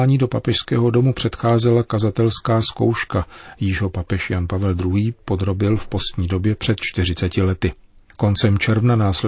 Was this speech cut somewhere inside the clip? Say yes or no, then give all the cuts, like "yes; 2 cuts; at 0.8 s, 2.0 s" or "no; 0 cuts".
no; 0 cuts